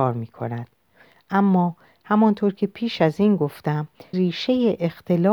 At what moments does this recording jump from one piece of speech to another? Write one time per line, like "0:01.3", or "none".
0:04.1